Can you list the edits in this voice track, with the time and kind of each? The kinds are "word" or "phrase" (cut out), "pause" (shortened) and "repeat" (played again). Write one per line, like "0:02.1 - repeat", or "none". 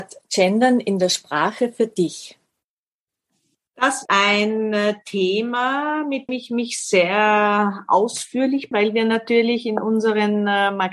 0:04.0 - word
0:06.3 - word
0:08.7 - word